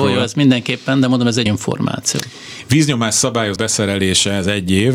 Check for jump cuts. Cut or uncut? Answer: cut